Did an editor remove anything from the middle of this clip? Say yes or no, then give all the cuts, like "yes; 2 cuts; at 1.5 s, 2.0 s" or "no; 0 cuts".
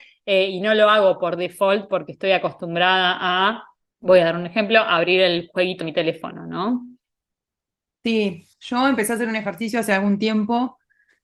yes; 3 cuts; at 3.8 s, 5.8 s, 8.5 s